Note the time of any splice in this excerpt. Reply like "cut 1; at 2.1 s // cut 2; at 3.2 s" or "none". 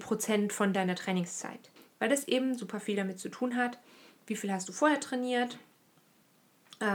cut 1; at 1.8 s